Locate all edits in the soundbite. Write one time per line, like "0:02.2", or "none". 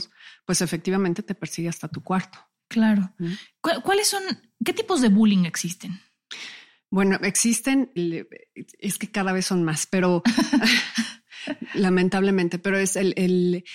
0:08.0